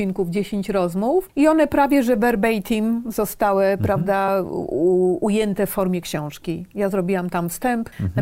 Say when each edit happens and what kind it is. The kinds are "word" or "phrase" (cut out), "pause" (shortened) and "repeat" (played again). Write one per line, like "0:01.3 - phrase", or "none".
none